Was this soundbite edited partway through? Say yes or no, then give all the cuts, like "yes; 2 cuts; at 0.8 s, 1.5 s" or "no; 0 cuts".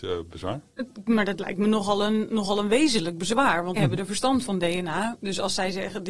yes; 2 cuts; at 3.8 s, 4.5 s